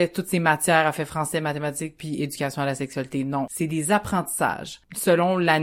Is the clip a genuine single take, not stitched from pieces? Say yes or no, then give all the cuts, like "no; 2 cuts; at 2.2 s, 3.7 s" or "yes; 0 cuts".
yes; 0 cuts